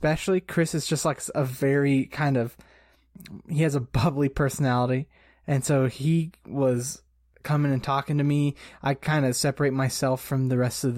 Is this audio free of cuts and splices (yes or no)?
yes